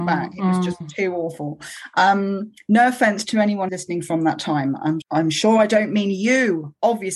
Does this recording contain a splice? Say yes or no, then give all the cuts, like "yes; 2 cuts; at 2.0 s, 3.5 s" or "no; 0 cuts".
yes; 2 cuts; at 3.7 s, 5.0 s